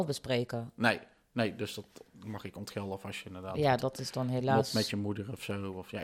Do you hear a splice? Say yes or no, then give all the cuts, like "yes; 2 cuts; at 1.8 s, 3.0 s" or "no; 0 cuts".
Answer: no; 0 cuts